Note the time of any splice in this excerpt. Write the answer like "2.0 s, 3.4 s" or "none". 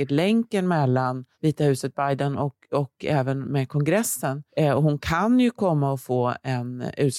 1.3 s, 4.5 s